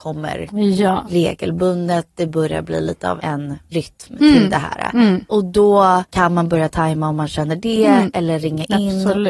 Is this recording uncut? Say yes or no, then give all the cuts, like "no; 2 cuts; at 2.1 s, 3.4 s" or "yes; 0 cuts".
no; 3 cuts; at 3.2 s, 3.7 s, 6.1 s